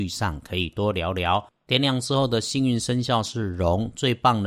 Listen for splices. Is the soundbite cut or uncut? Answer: uncut